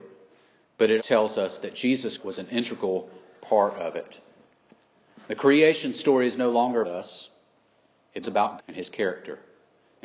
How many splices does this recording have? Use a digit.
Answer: 5